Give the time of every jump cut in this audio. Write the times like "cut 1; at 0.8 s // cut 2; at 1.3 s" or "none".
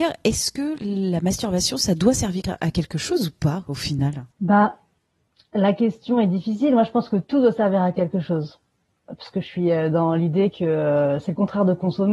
cut 1; at 4.3 s